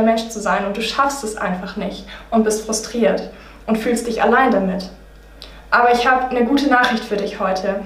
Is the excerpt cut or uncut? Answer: uncut